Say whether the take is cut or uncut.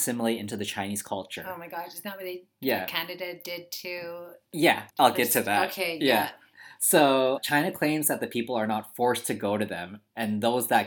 cut